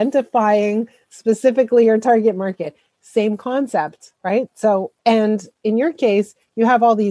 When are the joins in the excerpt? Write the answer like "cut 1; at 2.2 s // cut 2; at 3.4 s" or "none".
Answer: cut 1; at 4.2 s // cut 2; at 5.0 s

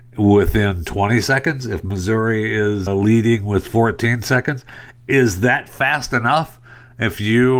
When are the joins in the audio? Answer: cut 1; at 2.9 s

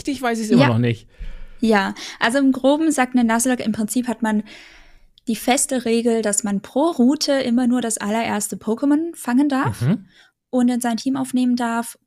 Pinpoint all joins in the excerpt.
none

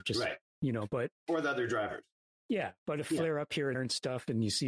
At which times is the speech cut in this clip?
cut 1; at 1.2 s // cut 2; at 3.7 s

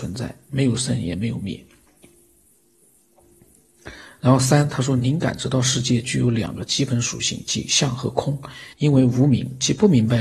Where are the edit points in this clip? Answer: cut 1; at 8.7 s

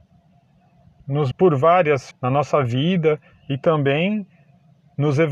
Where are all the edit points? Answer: cut 1; at 1.0 s // cut 2; at 1.3 s // cut 3; at 2.1 s

